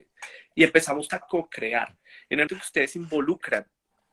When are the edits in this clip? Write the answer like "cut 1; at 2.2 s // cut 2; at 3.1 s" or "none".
cut 1; at 1.1 s // cut 2; at 2.5 s